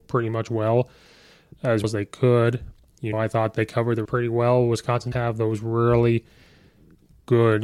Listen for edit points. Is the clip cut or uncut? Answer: cut